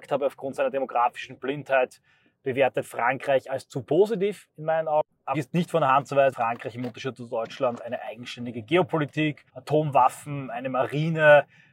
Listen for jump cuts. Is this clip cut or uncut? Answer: cut